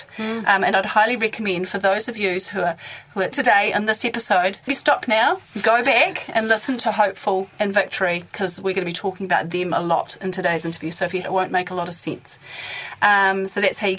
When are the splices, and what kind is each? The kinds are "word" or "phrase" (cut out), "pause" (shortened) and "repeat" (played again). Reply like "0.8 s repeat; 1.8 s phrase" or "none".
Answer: 3.3 s word; 4.7 s word; 11.2 s phrase